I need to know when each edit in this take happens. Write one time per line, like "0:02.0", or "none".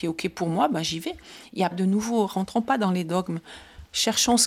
0:01.7